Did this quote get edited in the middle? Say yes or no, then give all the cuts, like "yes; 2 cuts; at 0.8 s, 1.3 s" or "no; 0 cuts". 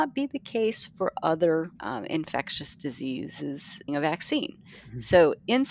yes; 2 cuts; at 1.8 s, 3.9 s